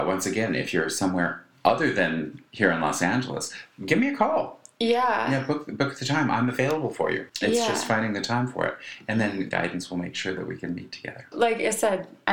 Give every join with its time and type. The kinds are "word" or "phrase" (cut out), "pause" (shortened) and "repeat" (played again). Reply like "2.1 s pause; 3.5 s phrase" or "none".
7.3 s pause; 9.5 s word; 11.3 s word